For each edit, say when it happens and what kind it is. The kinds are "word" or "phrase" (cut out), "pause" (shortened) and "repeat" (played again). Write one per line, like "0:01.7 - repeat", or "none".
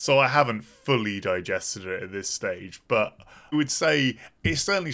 0:03.5 - word